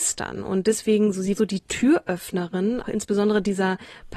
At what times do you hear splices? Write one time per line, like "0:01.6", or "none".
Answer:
0:01.4
0:02.8